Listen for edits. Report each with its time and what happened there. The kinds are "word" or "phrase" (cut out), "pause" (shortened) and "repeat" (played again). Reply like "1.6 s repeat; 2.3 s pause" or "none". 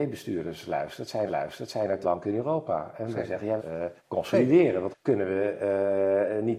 1.3 s repeat; 2.0 s word; 3.6 s phrase; 4.0 s pause; 4.9 s word